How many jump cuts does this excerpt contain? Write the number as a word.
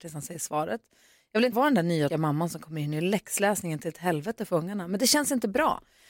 two